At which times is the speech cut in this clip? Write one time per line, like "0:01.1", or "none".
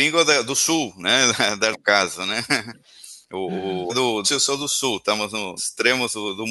0:01.7
0:03.2
0:03.9
0:04.2
0:05.6